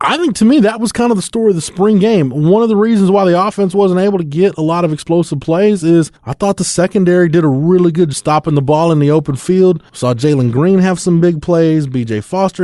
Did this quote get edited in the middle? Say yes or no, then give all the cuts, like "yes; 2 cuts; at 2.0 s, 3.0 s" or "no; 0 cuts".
yes; 1 cut; at 8.1 s